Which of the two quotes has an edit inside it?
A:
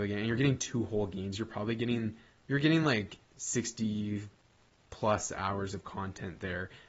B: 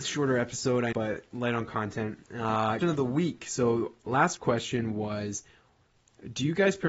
B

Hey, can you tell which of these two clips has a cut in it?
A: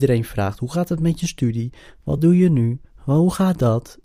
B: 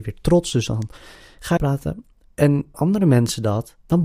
B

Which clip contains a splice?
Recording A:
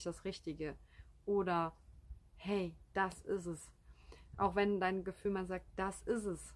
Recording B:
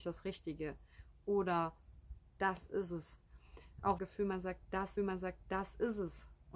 B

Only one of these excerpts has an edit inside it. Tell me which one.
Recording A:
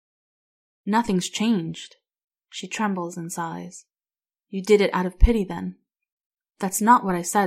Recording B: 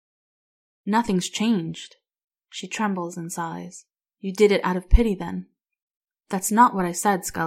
B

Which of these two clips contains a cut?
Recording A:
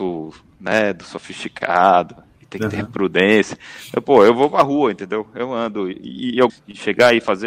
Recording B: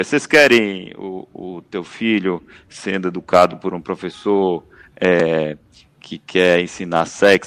A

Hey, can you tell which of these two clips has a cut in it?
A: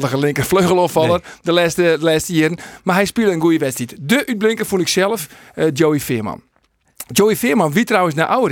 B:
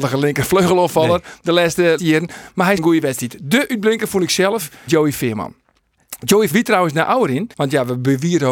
B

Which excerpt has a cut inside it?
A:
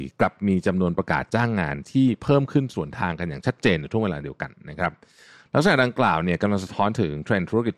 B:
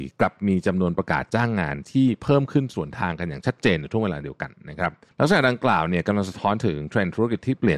B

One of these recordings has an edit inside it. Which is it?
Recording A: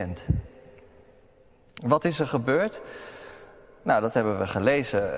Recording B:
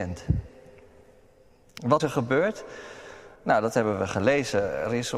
B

